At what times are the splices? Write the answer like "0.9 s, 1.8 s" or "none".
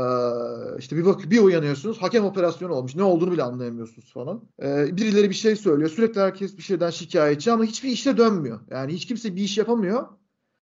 4.5 s